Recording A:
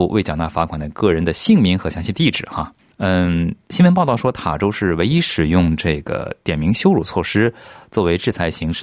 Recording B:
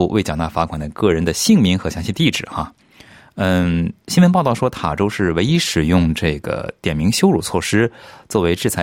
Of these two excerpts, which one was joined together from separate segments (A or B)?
A